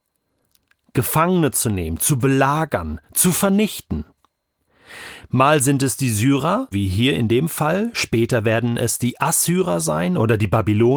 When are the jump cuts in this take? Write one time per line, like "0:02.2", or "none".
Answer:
0:06.7